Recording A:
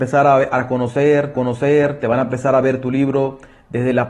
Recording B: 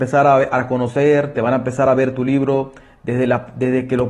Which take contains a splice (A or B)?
A